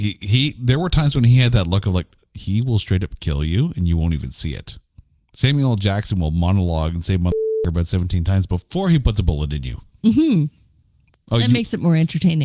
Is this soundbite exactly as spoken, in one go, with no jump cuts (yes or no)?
yes